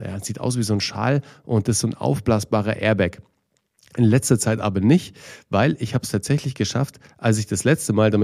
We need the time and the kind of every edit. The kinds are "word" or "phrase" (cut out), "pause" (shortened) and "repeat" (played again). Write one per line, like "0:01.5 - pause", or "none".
none